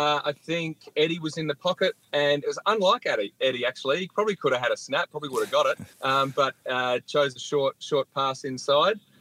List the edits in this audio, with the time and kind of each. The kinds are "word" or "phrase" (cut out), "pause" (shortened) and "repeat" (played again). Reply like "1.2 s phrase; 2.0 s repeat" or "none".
5.9 s pause